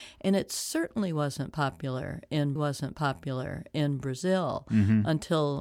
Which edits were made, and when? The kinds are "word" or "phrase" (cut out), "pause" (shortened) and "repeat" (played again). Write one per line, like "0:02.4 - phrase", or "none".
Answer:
0:02.6 - repeat